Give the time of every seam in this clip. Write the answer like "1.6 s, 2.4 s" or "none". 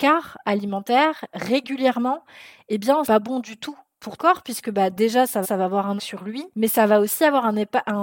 3.0 s, 4.2 s, 5.4 s, 6.0 s, 6.5 s